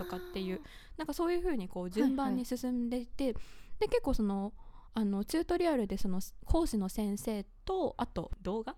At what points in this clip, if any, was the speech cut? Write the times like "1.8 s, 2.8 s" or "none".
none